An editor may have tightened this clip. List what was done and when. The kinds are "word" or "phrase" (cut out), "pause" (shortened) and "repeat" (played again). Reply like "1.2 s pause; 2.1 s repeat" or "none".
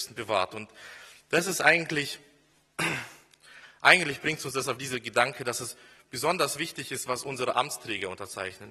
none